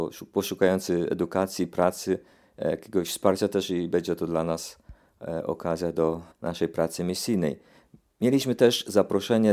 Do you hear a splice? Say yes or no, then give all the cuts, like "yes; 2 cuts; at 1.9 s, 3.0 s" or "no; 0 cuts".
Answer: yes; 1 cut; at 6.3 s